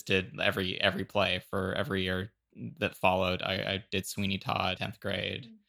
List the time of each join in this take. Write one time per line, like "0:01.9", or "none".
0:04.8